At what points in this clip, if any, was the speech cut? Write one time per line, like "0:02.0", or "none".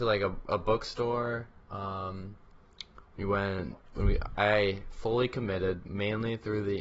0:03.9

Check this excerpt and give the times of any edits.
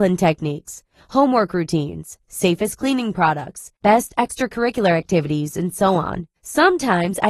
0:03.8
0:06.4

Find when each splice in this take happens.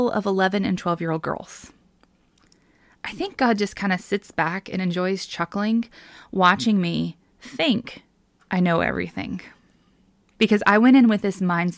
none

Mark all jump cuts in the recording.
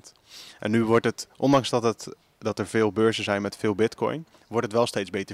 none

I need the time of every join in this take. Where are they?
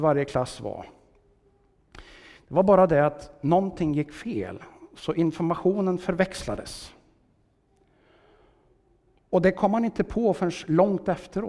none

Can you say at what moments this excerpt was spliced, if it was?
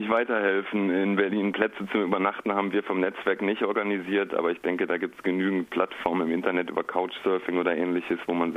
none

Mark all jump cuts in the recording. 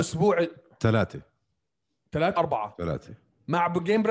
0:02.4

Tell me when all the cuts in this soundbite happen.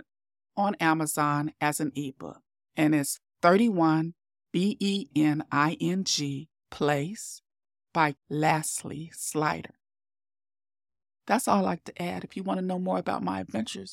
0:02.5
0:08.2

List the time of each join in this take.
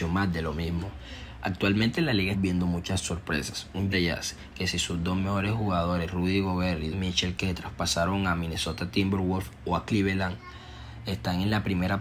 0:02.3
0:03.9
0:06.9

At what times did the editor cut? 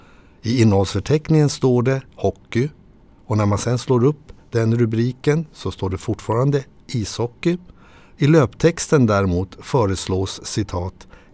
none

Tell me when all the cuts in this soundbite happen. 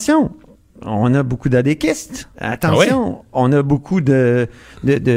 0:02.3

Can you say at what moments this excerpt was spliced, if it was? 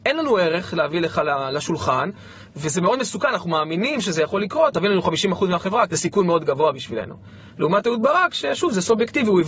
0:04.7
0:05.9

